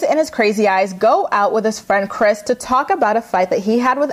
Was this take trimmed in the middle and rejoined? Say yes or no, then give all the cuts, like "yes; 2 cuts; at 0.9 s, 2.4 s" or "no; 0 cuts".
no; 0 cuts